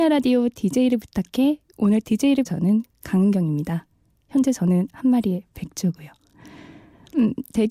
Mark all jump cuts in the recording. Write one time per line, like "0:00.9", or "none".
0:02.4